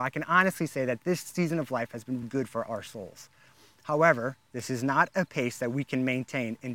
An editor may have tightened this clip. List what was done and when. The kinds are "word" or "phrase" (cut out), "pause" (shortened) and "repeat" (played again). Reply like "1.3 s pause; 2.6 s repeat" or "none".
2.2 s word

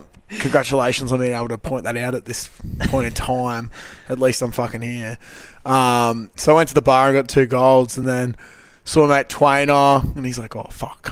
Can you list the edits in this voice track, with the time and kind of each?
none

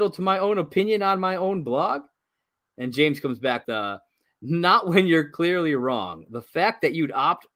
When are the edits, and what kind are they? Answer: 3.6 s word

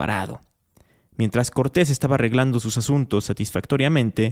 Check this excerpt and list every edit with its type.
none

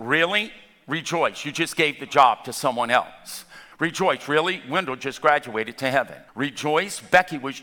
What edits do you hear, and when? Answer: 3.7 s pause; 6.3 s pause

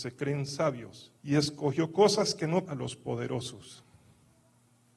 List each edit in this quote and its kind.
1.2 s pause; 2.7 s phrase

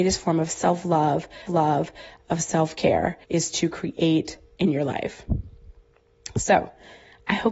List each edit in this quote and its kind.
1.5 s repeat; 3.2 s pause; 4.6 s word

